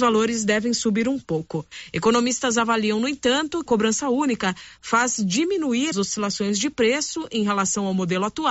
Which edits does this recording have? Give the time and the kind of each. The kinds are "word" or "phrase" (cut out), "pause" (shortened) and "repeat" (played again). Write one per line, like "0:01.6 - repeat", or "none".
0:03.7 - word
0:05.9 - word